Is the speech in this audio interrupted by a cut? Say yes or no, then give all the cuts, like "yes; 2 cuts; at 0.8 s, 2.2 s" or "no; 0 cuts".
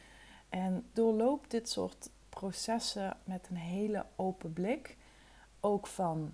yes; 2 cuts; at 0.9 s, 3.2 s